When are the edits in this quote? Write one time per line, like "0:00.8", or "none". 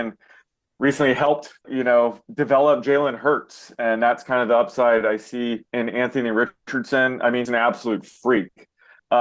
0:01.6
0:05.7
0:07.5